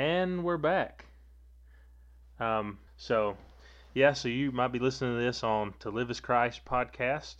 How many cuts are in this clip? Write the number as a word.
one